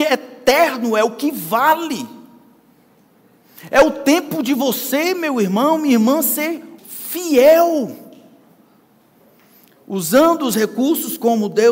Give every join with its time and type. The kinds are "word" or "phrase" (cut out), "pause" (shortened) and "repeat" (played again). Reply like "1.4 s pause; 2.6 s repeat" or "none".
6.8 s word